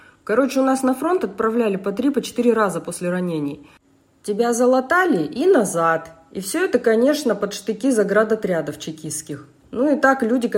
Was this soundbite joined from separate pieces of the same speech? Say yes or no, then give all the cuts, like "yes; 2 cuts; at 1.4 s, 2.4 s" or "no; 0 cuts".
no; 0 cuts